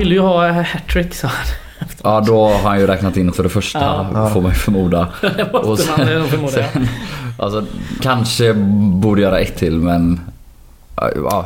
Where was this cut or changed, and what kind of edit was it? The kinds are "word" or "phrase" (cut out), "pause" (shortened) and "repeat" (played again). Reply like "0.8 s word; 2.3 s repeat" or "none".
3.3 s word; 8.0 s word; 9.6 s word